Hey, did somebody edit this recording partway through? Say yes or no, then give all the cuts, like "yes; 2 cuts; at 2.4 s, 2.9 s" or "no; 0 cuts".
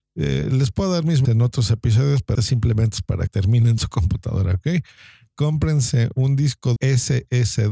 yes; 5 cuts; at 1.2 s, 2.3 s, 3.3 s, 3.8 s, 6.8 s